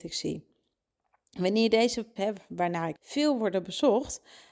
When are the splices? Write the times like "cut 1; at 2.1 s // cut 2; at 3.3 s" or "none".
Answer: cut 1; at 2.2 s // cut 2; at 3.0 s

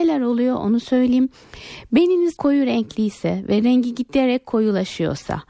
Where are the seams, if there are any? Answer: cut 1; at 2.4 s

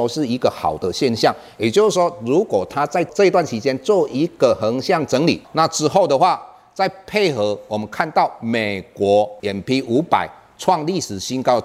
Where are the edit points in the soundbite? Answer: cut 1; at 9.4 s

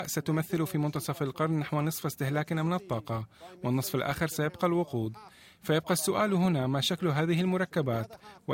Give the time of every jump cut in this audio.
none

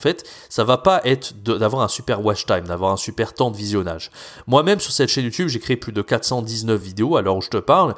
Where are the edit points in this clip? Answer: none

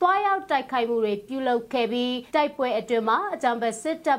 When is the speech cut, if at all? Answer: cut 1; at 2.3 s

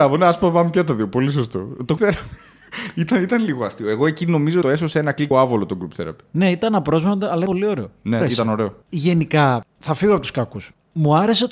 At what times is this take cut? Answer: cut 1; at 2.0 s // cut 2; at 4.6 s // cut 3; at 5.3 s // cut 4; at 7.5 s // cut 5; at 8.2 s // cut 6; at 8.8 s

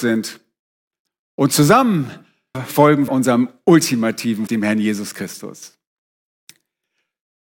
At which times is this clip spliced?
cut 1; at 2.5 s // cut 2; at 3.1 s // cut 3; at 4.5 s

